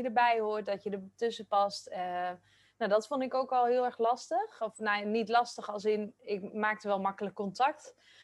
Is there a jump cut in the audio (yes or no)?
no